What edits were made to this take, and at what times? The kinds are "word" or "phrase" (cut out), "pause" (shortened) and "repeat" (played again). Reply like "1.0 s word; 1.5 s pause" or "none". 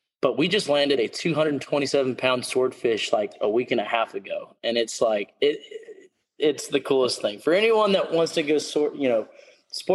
none